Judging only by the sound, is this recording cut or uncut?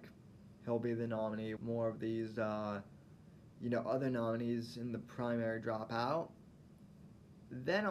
cut